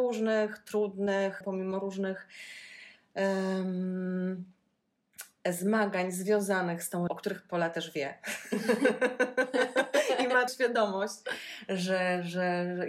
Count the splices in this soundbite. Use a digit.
3